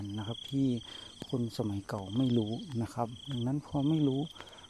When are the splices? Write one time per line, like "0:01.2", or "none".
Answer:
none